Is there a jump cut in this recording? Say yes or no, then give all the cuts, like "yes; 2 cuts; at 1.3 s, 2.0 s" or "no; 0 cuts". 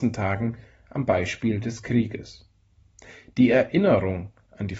no; 0 cuts